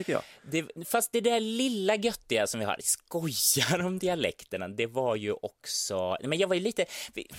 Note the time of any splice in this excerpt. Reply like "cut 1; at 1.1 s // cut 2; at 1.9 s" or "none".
none